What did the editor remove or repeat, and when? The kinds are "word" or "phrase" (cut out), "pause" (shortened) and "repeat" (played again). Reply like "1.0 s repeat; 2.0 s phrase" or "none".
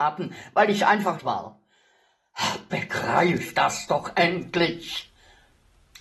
1.2 s phrase